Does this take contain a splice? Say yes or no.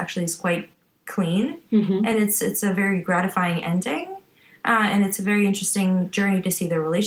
no